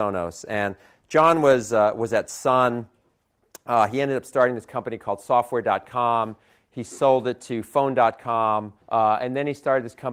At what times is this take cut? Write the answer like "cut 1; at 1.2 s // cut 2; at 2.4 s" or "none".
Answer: cut 1; at 8.8 s